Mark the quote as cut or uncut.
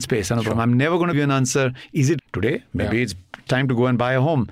cut